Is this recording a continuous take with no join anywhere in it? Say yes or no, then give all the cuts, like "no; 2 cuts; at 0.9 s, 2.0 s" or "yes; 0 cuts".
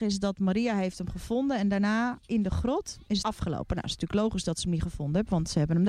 no; 2 cuts; at 2.3 s, 3.2 s